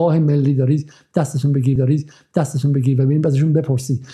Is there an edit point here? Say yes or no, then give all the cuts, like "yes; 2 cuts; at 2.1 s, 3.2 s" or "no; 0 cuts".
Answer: yes; 1 cut; at 1.8 s